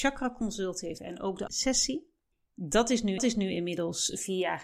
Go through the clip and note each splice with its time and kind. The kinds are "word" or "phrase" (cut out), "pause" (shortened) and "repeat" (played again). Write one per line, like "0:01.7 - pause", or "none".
0:01.0 - word
0:01.5 - word
0:02.3 - pause
0:03.2 - repeat